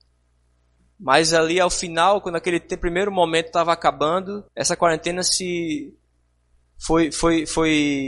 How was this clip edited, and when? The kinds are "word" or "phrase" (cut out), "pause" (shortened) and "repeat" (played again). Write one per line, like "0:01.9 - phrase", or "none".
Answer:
0:04.5 - pause